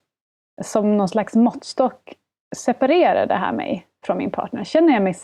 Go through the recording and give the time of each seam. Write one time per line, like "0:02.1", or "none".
none